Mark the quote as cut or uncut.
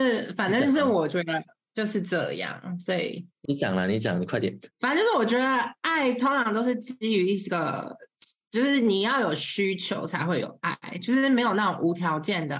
cut